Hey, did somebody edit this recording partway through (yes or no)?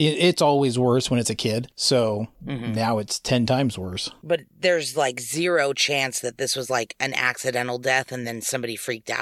no